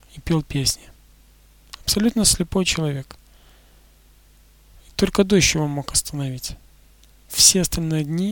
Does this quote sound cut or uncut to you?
uncut